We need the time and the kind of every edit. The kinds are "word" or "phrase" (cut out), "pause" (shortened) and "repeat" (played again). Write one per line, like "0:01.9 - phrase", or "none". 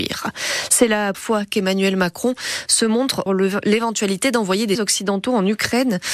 0:01.1 - word
0:03.3 - phrase
0:04.7 - word